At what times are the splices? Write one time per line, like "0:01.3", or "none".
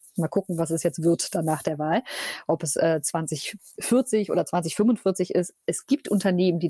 none